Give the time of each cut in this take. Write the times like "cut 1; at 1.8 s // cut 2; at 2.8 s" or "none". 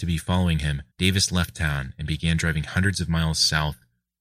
cut 1; at 0.9 s